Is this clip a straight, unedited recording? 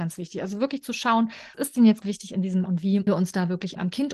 no; 4 cuts; at 1.5 s, 2.0 s, 2.7 s, 3.1 s

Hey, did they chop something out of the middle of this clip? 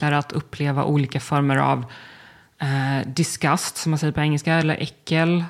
no; 0 cuts

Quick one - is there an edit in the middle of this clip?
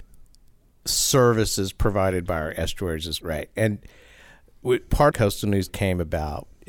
yes; 3 cuts; at 3.2 s, 5.1 s, 5.7 s

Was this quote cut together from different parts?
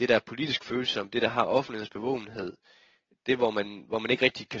no; 0 cuts

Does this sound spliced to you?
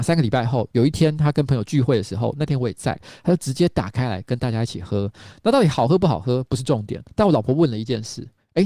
yes; 1 cut; at 7.1 s

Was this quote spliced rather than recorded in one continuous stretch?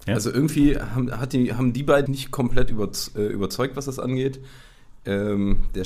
yes; 1 cut; at 2.1 s

